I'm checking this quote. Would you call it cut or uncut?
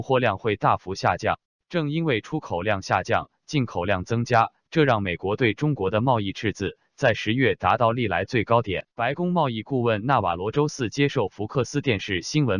cut